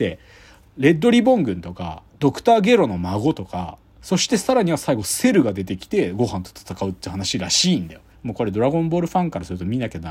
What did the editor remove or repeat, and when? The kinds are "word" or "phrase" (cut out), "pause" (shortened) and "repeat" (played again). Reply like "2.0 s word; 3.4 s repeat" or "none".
2.1 s pause; 8.1 s pause